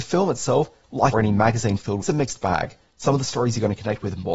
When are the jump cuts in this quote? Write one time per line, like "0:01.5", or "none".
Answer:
0:01.1
0:02.0

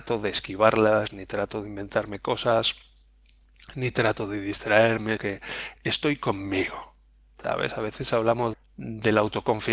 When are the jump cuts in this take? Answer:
0:05.2
0:08.5

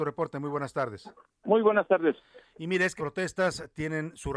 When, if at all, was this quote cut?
0:03.0

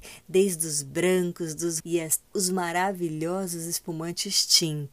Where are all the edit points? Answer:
0:01.8
0:02.2

